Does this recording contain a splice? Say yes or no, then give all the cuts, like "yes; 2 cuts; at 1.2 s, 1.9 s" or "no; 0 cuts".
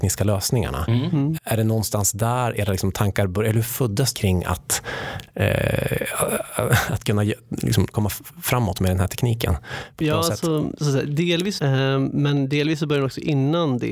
yes; 4 cuts; at 1.4 s, 4.1 s, 7.9 s, 11.6 s